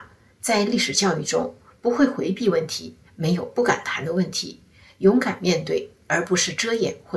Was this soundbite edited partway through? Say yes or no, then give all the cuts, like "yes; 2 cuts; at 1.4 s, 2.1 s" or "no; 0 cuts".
no; 0 cuts